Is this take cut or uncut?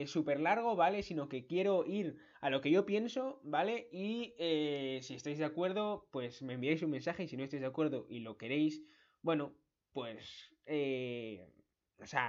uncut